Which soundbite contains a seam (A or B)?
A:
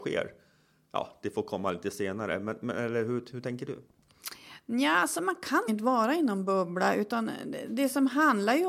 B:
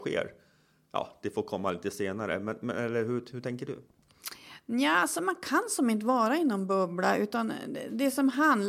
A